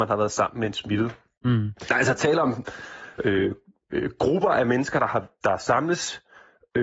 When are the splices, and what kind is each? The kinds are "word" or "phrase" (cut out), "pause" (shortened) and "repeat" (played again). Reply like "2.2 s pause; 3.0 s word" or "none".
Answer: none